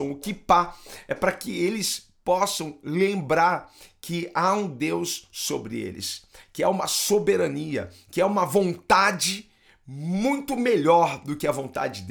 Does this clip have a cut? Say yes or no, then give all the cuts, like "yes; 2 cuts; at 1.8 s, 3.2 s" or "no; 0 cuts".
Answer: no; 0 cuts